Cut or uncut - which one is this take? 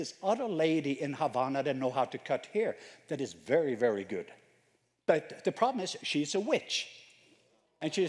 uncut